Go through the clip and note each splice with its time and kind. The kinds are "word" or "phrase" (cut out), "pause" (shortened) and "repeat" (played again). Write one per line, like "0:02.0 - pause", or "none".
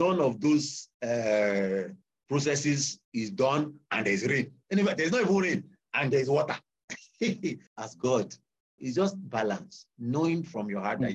0:00.9 - pause
0:03.0 - pause
0:07.7 - pause
0:08.8 - word